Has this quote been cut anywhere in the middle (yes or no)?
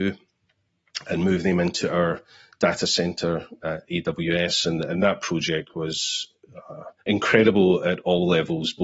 yes